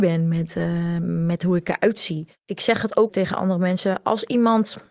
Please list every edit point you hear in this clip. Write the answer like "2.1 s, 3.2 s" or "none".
3.1 s